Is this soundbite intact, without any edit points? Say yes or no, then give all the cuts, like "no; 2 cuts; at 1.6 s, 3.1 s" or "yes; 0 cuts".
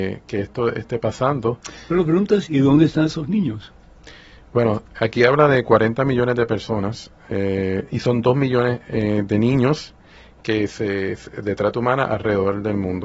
yes; 0 cuts